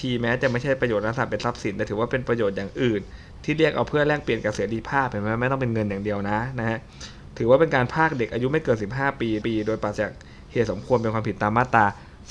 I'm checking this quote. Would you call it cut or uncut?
cut